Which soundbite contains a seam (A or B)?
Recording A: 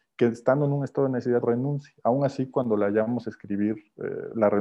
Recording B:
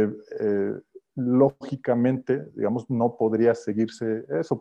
A